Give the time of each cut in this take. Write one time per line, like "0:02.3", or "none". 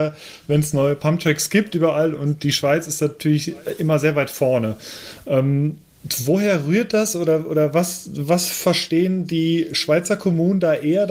none